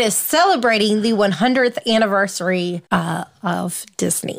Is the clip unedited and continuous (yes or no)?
no